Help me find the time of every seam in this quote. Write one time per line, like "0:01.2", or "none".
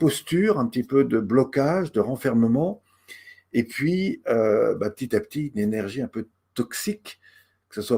none